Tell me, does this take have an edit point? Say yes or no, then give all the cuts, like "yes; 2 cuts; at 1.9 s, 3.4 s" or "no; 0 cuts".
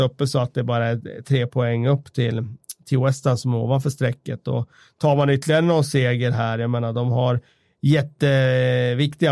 no; 0 cuts